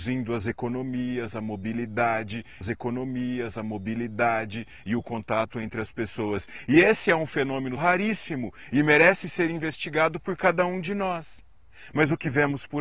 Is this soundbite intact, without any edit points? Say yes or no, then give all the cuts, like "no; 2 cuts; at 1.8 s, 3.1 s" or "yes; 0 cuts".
no; 2 cuts; at 2.6 s, 7.8 s